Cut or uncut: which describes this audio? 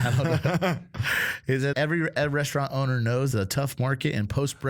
cut